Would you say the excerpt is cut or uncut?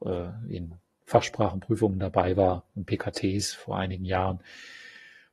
uncut